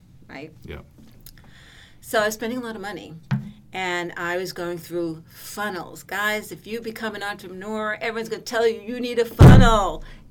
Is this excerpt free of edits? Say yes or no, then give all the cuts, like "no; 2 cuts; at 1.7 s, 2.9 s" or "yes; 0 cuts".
yes; 0 cuts